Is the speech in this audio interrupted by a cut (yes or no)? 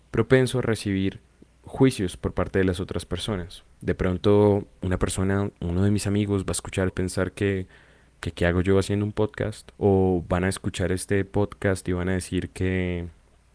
yes